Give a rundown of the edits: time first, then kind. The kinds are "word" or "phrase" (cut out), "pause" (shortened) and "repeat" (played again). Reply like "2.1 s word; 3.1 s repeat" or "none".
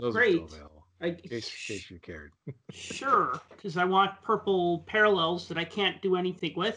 2.4 s pause